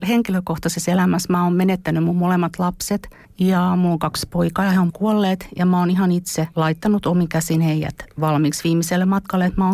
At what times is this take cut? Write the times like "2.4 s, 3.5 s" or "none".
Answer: 3.2 s, 4.9 s, 6.5 s